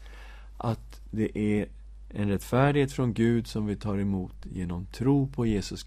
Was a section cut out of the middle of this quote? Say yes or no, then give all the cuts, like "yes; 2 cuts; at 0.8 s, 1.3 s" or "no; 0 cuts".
no; 0 cuts